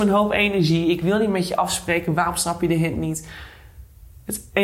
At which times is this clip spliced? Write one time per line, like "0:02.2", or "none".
none